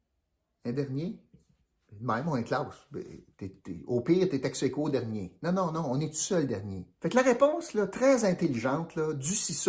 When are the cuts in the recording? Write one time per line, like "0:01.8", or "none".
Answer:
0:03.3
0:07.0